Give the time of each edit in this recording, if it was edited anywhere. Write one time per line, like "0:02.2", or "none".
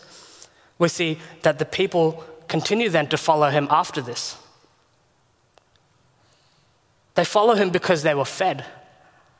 none

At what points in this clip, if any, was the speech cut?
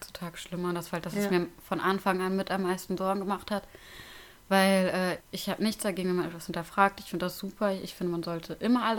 0:05.2

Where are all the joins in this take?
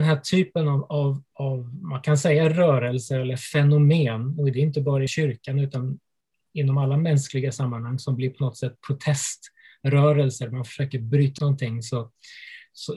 0:01.3
0:05.1
0:11.4

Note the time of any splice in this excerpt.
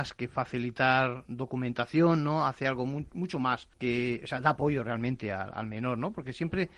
0:03.7

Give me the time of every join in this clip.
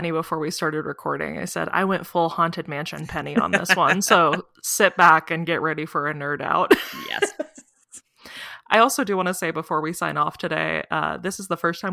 none

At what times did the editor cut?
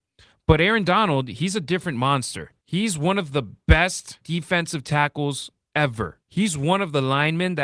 0:02.6
0:04.2
0:06.2

